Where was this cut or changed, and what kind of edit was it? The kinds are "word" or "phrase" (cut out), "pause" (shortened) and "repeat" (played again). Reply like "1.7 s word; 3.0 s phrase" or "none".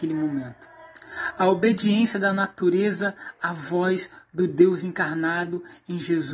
none